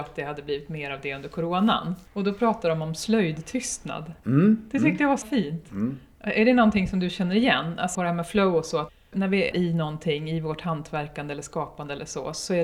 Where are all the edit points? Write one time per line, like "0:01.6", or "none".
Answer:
0:02.1
0:04.2
0:05.2
0:07.9
0:09.5